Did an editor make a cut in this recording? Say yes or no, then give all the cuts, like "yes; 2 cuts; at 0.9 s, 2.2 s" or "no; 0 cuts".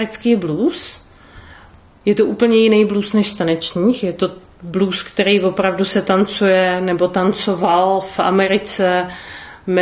no; 0 cuts